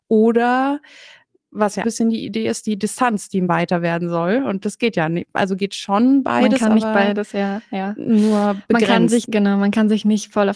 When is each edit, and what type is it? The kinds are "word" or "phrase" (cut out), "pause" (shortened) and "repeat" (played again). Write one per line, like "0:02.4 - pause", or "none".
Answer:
0:01.8 - phrase
0:03.5 - word
0:09.2 - word